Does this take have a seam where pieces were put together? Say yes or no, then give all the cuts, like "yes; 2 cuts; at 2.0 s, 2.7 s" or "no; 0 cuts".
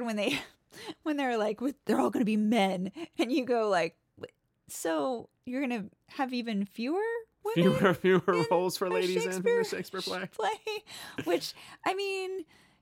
no; 0 cuts